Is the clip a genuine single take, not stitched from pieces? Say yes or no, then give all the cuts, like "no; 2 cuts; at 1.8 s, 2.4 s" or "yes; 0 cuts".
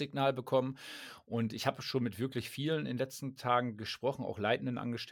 yes; 0 cuts